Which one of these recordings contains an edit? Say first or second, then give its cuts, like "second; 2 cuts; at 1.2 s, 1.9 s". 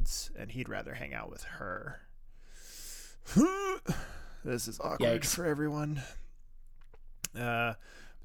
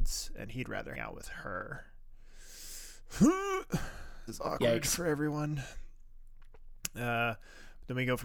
second; 2 cuts; at 0.9 s, 4.3 s